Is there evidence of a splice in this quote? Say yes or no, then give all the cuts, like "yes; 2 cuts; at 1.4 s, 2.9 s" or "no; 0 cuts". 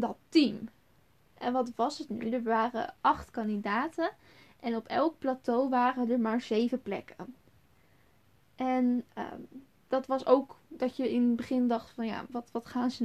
no; 0 cuts